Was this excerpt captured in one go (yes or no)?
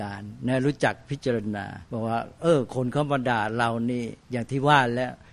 no